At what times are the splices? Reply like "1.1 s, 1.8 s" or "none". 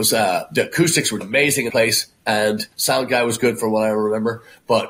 1.2 s, 1.7 s, 2.7 s